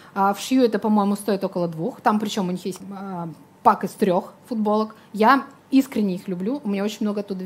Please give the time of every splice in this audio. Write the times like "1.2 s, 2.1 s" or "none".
2.8 s